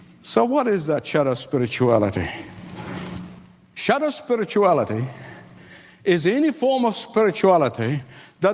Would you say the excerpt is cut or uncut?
uncut